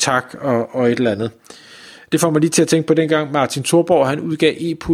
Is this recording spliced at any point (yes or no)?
no